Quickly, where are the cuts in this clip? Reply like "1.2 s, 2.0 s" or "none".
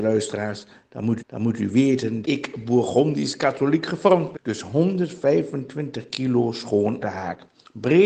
1.2 s, 2.2 s, 4.3 s, 7.0 s